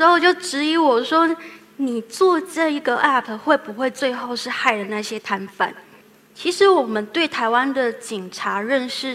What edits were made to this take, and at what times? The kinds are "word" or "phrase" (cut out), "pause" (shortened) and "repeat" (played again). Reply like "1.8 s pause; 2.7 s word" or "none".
6.0 s pause